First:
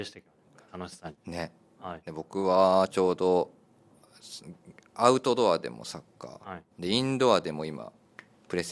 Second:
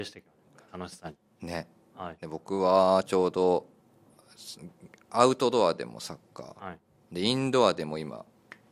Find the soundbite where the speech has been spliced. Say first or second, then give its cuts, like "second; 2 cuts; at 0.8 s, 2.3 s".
first; 2 cuts; at 1.2 s, 6.7 s